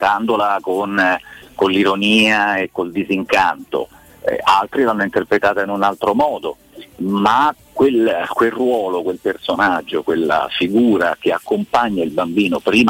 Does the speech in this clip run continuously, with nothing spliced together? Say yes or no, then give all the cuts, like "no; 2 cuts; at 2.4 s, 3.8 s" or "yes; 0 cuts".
yes; 0 cuts